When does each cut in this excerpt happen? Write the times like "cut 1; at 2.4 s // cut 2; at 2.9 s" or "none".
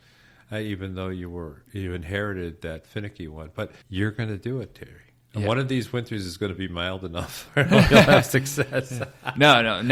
cut 1; at 3.8 s

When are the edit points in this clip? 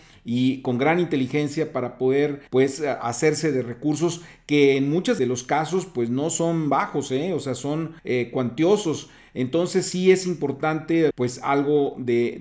cut 1; at 2.5 s // cut 2; at 5.2 s // cut 3; at 8.0 s // cut 4; at 11.1 s

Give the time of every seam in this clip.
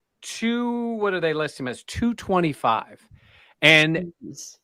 none

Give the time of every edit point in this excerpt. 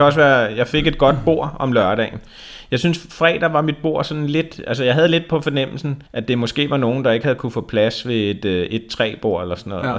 cut 1; at 6.1 s

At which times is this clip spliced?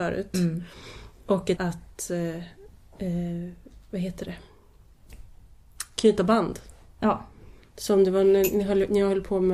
cut 1; at 1.6 s

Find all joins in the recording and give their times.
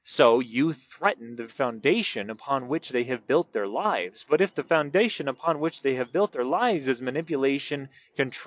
cut 1; at 1.5 s

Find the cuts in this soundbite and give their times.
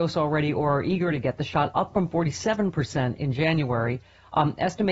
none

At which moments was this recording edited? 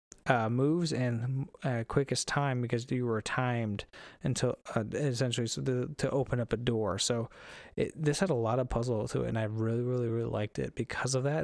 none

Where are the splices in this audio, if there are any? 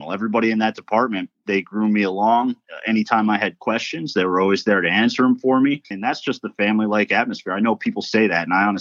cut 1; at 5.8 s

